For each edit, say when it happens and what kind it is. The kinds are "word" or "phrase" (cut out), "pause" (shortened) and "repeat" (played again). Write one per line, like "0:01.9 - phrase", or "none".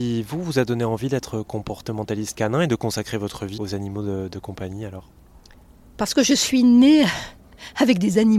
0:03.6 - word